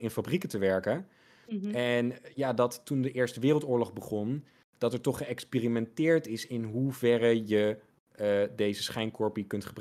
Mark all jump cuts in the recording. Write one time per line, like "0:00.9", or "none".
none